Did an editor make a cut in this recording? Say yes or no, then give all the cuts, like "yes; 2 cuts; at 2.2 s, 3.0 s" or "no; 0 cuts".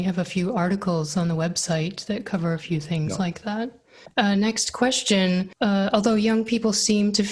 no; 0 cuts